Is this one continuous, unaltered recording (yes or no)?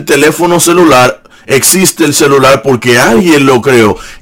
yes